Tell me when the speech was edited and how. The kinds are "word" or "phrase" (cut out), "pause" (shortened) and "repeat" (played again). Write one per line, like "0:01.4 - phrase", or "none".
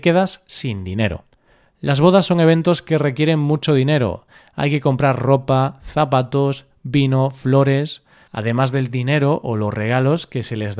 none